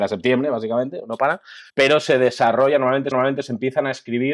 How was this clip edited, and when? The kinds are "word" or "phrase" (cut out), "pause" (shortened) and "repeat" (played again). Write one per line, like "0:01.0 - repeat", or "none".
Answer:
0:01.7 - pause
0:03.1 - repeat

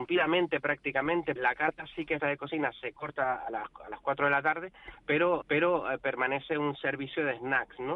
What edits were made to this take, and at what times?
0:01.4 - word
0:02.2 - phrase
0:05.4 - repeat

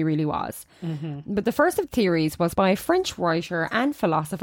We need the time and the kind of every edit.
0:01.9 - word
0:02.5 - word

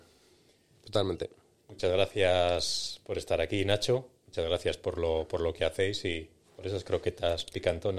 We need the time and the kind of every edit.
none

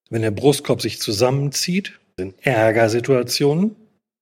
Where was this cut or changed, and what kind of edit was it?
0:02.2 - word

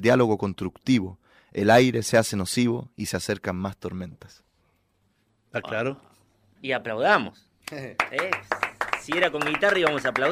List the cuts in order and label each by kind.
none

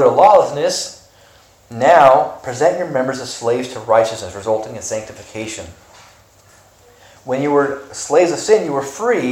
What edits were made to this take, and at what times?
none

